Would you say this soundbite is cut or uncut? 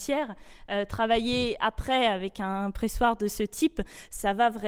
uncut